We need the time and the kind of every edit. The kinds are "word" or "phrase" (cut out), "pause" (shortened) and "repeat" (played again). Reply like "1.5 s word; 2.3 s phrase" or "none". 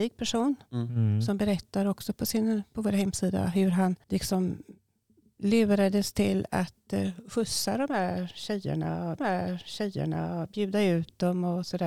4.0 s pause; 9.2 s repeat